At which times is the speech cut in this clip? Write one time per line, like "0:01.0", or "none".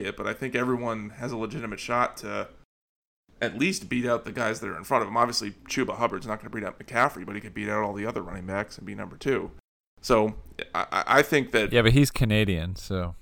none